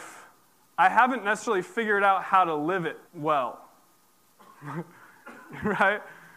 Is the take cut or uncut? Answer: cut